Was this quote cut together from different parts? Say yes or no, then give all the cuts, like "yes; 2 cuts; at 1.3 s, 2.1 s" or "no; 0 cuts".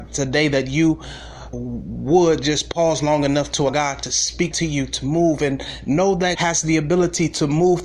yes; 4 cuts; at 1.5 s, 3.7 s, 4.5 s, 6.3 s